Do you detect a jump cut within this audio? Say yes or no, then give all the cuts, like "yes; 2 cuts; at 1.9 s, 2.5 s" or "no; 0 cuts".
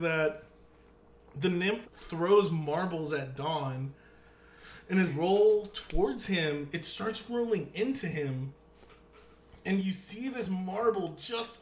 yes; 2 cuts; at 1.8 s, 5.1 s